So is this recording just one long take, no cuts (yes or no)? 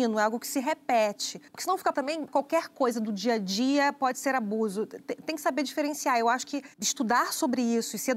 no